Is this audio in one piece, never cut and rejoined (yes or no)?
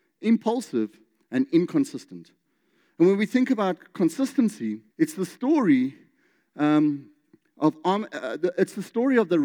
no